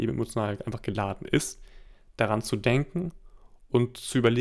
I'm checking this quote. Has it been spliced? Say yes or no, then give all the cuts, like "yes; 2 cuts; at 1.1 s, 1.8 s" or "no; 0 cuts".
no; 0 cuts